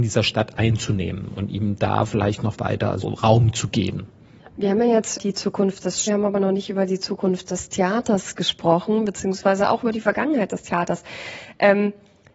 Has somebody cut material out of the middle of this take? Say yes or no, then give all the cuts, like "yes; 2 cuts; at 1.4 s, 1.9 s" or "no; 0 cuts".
yes; 4 cuts; at 3.0 s, 4.4 s, 5.2 s, 6.1 s